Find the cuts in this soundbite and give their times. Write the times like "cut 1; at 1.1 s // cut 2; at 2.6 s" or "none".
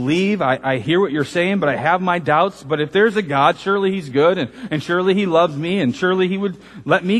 none